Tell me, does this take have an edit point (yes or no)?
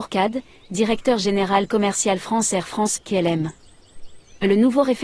no